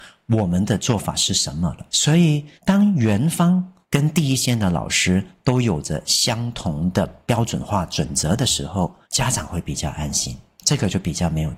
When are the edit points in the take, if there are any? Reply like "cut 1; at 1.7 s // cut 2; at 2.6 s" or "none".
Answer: cut 1; at 1.9 s // cut 2; at 2.6 s // cut 3; at 3.8 s // cut 4; at 9.0 s